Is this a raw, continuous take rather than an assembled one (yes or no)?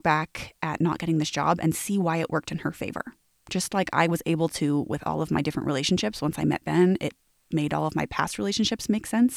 yes